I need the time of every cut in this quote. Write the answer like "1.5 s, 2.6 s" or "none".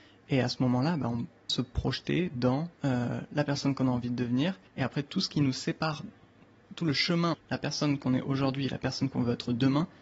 1.5 s, 2.7 s, 4.7 s, 7.3 s